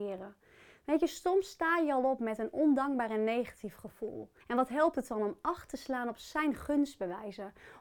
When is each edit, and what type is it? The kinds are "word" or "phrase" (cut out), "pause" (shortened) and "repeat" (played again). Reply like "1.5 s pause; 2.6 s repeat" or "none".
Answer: 4.4 s pause